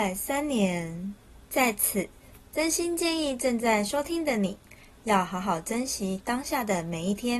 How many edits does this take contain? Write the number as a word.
one